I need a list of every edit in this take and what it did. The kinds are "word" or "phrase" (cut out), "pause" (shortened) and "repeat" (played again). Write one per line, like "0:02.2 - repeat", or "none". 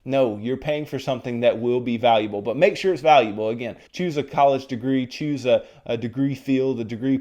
0:03.9 - pause